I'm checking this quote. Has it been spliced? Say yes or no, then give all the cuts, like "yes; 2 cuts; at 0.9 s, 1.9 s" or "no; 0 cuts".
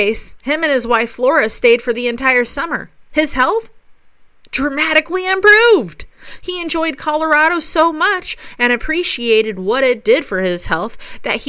no; 0 cuts